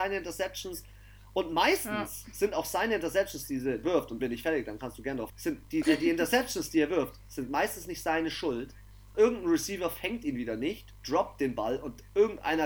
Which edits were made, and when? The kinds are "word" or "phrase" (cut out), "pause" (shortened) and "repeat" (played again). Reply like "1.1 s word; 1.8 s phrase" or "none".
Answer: 3.8 s word; 4.2 s word; 5.3 s word; 5.8 s word; 9.1 s word